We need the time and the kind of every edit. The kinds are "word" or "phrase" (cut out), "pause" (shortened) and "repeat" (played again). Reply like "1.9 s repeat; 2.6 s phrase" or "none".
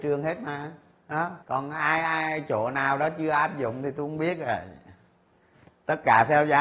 1.4 s pause